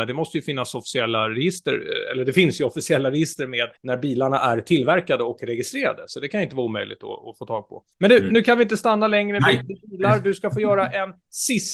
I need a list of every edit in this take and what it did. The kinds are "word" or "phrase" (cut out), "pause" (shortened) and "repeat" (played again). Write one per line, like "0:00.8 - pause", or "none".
0:03.8 - pause
0:07.9 - pause